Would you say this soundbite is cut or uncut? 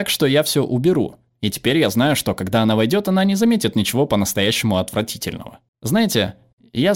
uncut